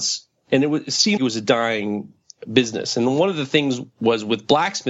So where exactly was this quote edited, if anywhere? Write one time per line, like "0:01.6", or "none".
0:01.2